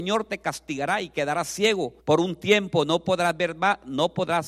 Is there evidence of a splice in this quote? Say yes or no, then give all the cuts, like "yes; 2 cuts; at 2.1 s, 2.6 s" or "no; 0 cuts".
yes; 1 cut; at 2.0 s